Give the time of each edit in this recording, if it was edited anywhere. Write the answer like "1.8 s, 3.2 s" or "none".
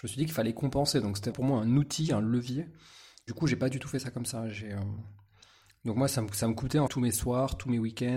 1.3 s, 3.3 s, 6.9 s